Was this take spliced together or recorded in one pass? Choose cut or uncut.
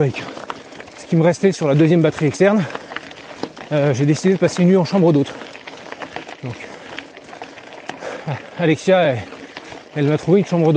uncut